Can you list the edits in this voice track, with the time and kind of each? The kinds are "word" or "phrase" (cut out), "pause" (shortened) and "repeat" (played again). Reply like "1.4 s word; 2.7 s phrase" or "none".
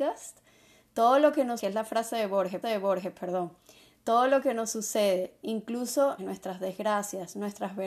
1.6 s word; 2.6 s repeat; 6.2 s phrase